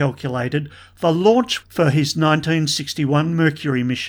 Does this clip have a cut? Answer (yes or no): yes